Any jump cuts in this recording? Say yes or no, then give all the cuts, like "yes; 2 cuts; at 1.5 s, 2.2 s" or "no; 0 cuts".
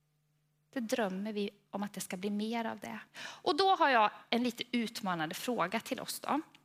yes; 1 cut; at 3.1 s